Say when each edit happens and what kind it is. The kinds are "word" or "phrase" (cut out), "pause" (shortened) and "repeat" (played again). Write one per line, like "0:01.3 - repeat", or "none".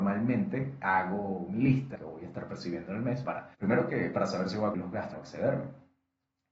0:02.0 - phrase
0:03.2 - word
0:03.5 - pause
0:04.7 - word
0:05.1 - phrase